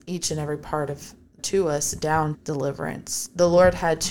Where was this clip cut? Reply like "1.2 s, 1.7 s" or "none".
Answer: 1.4 s, 2.3 s